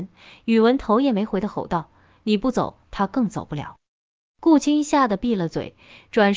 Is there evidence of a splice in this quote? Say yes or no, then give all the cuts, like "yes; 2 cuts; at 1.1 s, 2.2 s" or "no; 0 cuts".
no; 0 cuts